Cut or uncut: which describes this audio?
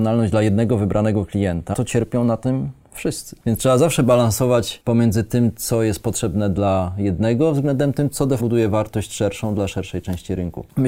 cut